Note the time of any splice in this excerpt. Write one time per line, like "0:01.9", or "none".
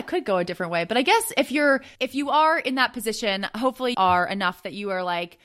0:01.9
0:03.9